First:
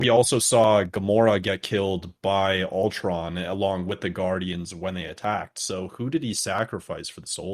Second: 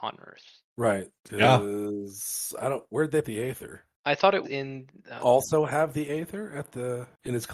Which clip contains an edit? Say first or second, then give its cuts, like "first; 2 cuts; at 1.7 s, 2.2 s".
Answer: second; 3 cuts; at 3.2 s, 4.4 s, 5.2 s